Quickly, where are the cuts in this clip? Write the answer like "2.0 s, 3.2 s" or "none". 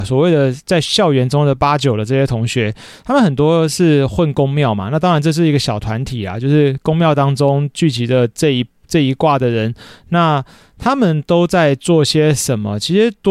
none